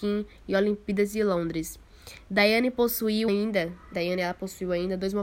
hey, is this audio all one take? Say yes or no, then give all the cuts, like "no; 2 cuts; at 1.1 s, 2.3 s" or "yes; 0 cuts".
no; 2 cuts; at 3.3 s, 3.9 s